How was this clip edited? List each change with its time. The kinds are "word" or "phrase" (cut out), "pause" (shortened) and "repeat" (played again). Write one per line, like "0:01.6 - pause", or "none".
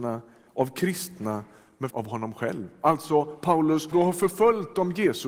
0:01.9 - word
0:03.9 - word